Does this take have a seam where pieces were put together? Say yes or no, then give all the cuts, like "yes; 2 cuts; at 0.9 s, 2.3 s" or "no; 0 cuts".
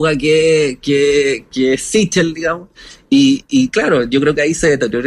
no; 0 cuts